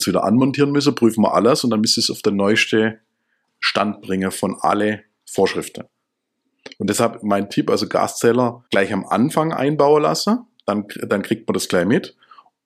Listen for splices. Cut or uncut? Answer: cut